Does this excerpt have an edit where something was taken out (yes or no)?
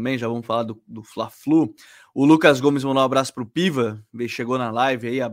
no